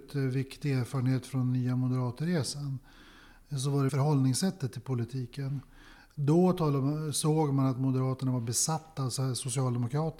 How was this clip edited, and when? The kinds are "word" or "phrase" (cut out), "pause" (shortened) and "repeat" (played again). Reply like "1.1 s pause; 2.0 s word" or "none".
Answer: 3.9 s word